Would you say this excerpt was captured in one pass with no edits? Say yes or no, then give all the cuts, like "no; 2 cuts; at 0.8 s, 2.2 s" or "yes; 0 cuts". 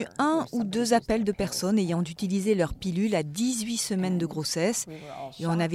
yes; 0 cuts